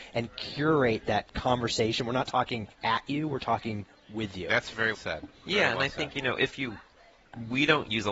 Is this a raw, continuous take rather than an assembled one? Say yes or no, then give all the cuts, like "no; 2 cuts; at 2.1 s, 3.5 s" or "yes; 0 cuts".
no; 2 cuts; at 2.7 s, 4.9 s